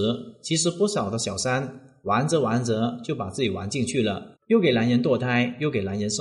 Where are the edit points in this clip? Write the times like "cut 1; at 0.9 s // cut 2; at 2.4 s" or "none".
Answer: cut 1; at 4.4 s